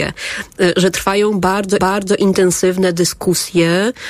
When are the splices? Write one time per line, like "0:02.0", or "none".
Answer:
0:01.8